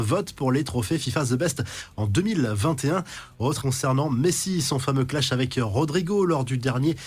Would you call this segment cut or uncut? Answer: cut